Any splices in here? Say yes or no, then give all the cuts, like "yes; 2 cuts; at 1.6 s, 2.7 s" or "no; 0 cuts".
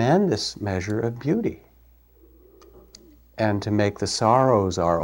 no; 0 cuts